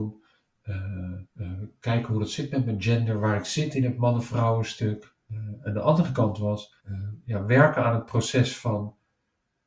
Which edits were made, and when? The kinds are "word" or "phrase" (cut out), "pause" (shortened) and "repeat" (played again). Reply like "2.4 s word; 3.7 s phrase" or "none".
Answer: 1.3 s pause; 6.8 s pause